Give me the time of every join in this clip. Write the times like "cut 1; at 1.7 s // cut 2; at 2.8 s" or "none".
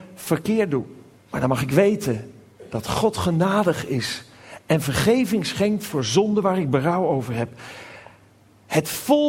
cut 1; at 1.2 s